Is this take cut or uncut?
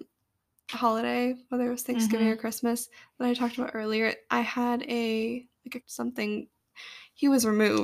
cut